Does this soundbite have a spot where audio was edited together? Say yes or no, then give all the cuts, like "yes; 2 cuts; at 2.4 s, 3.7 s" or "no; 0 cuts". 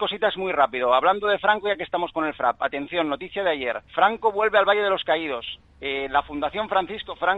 yes; 1 cut; at 3.8 s